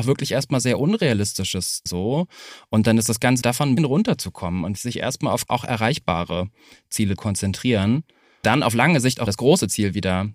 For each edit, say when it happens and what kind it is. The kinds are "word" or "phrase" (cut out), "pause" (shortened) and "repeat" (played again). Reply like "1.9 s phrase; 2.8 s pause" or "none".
1.9 s word; 3.4 s word; 3.8 s word; 4.8 s word; 5.5 s word; 7.2 s word; 8.4 s word; 9.3 s word